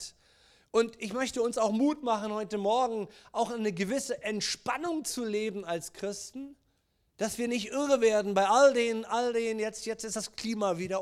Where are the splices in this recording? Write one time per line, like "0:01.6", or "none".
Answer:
0:06.9